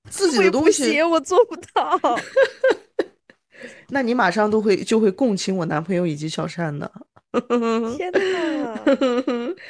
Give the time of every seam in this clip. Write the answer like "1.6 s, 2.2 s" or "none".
none